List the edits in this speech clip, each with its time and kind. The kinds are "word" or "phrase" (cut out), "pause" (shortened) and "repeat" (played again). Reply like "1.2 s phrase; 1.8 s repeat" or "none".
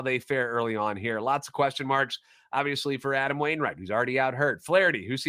none